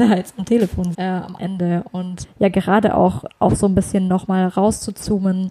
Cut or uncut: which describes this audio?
cut